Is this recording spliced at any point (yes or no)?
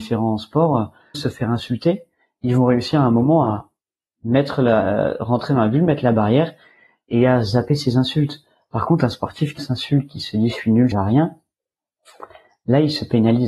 yes